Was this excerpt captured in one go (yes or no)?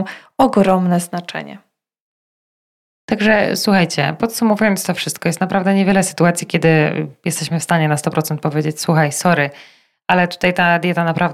yes